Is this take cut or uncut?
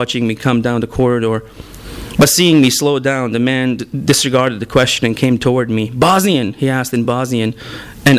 uncut